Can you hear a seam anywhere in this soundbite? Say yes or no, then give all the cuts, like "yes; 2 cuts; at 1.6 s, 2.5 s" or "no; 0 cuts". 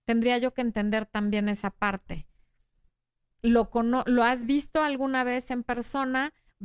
no; 0 cuts